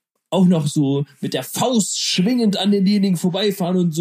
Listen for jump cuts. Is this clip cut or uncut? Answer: uncut